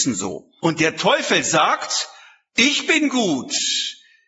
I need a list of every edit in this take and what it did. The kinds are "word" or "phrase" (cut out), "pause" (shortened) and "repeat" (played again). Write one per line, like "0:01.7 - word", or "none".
none

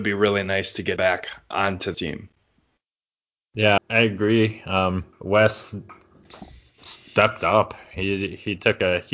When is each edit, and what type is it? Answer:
0:01.0 - word
0:01.9 - word
0:03.8 - word
0:05.1 - pause

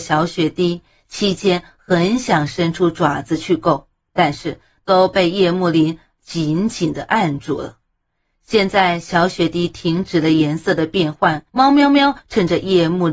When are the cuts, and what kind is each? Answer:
0:11.5 - pause

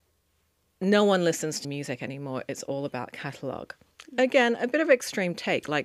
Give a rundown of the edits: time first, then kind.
0:01.6 - word

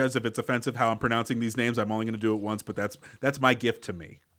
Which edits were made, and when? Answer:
none

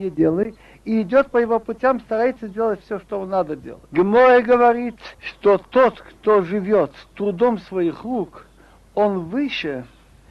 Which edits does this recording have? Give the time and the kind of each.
0:03.9 - pause
0:05.1 - pause

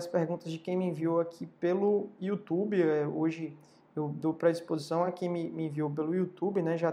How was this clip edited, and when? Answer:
none

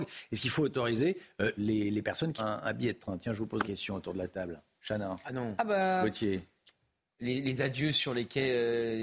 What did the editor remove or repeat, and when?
0:01.6 - word
0:02.4 - word
0:03.6 - word

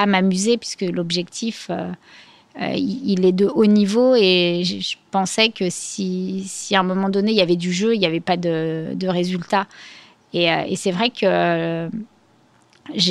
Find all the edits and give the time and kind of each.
none

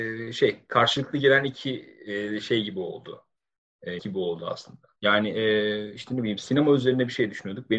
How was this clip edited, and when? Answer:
0:04.0 - word
0:05.0 - pause

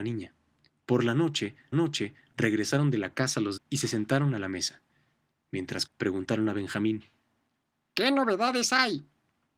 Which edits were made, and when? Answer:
0:01.7 - repeat
0:03.6 - word
0:05.9 - word

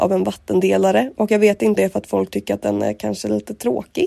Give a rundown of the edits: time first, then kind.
0:01.8 - word

